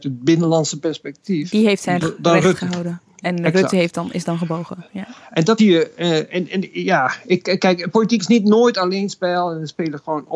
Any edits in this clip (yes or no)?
yes